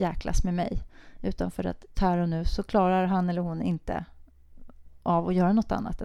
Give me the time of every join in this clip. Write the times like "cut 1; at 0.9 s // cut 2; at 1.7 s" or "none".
cut 1; at 1.9 s